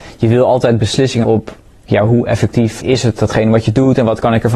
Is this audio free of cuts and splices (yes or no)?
no